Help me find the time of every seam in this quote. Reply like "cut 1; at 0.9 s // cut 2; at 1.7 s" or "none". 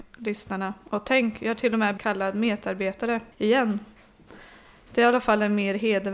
cut 1; at 2.0 s // cut 2; at 3.3 s